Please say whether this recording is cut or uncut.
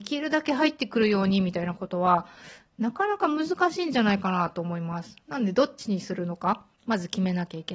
cut